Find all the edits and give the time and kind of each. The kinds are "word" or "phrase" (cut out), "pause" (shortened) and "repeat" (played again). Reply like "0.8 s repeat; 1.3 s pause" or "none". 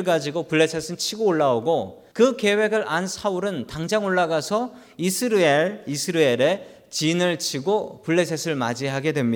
2.1 s pause